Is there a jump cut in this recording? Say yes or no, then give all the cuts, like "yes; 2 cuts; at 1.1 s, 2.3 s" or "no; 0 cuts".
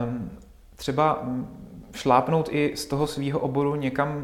no; 0 cuts